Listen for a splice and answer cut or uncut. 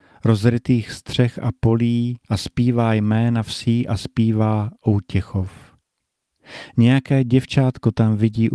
cut